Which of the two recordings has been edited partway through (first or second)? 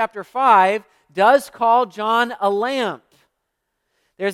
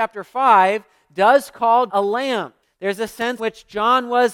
second